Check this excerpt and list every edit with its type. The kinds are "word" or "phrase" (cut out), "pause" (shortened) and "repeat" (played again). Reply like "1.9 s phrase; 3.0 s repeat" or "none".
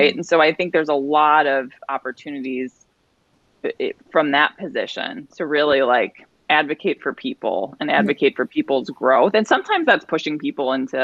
4.0 s pause